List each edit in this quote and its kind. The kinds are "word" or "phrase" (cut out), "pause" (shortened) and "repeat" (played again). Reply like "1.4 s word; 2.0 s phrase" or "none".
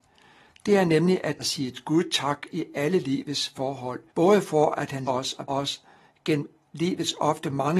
1.4 s word; 4.1 s pause; 5.1 s word; 5.5 s word